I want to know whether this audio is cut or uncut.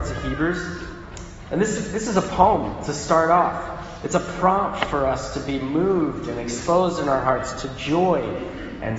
uncut